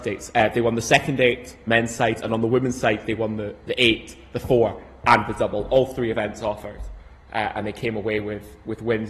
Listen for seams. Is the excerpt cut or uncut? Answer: cut